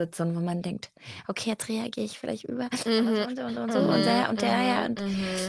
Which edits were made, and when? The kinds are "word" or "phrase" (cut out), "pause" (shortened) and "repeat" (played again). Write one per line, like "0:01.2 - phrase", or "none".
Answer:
none